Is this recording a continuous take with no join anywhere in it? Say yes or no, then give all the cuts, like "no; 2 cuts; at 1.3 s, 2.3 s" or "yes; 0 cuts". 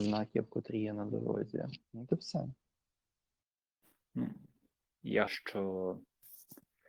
no; 2 cuts; at 1.8 s, 5.3 s